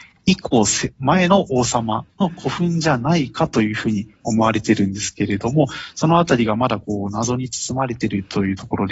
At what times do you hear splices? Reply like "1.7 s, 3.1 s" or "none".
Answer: 2.1 s